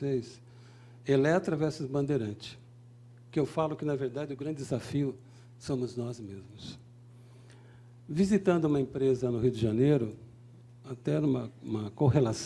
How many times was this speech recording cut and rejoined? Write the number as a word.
zero